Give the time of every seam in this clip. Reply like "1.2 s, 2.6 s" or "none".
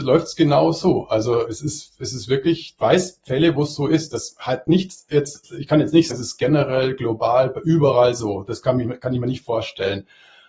1.4 s, 2.8 s, 6.1 s